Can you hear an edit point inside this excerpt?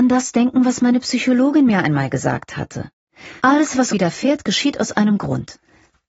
yes; 2 cuts; at 3.4 s, 3.9 s

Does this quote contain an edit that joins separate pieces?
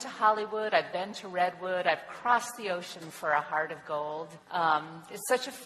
yes; 1 cut; at 4.4 s

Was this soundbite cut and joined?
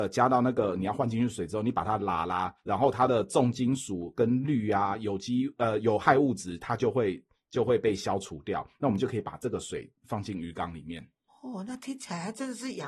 yes; 2 cuts; at 2.6 s, 10.0 s

